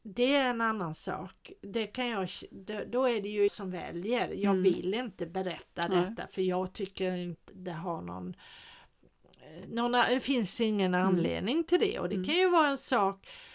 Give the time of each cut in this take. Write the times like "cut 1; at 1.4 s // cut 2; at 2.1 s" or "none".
cut 1; at 3.5 s // cut 2; at 7.5 s